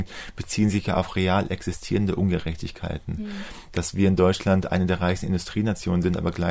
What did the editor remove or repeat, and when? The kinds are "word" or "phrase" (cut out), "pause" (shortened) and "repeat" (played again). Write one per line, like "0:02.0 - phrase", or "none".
none

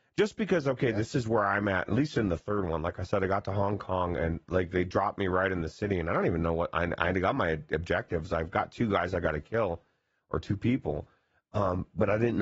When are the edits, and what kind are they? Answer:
none

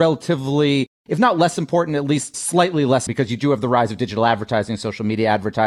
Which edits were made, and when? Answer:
0:03.1 - word

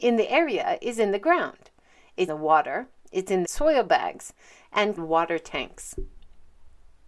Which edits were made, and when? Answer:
0:02.3 - word
0:03.4 - phrase
0:05.0 - word

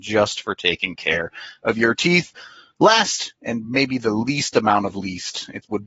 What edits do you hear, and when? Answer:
none

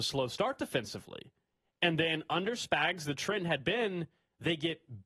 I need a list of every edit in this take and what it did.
none

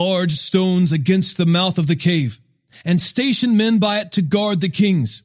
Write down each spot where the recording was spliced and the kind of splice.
none

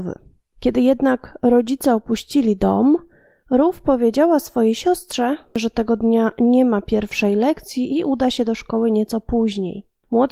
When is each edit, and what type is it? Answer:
none

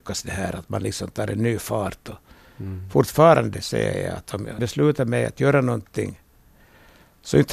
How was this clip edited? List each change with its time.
0:04.6 - word

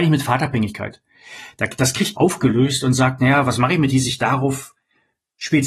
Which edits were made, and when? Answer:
0:02.2 - phrase
0:03.9 - phrase

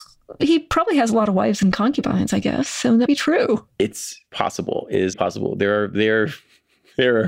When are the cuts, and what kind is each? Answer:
0:03.1 - word
0:04.3 - word
0:05.1 - word

